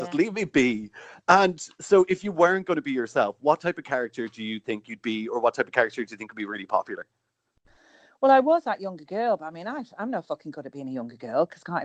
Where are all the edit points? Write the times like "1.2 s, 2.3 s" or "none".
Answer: none